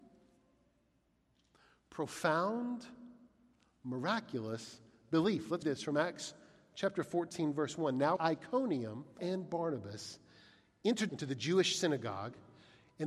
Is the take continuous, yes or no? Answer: no